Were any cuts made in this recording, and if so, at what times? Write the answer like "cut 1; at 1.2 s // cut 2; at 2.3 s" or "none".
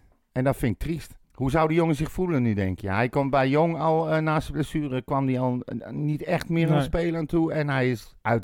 cut 1; at 1.2 s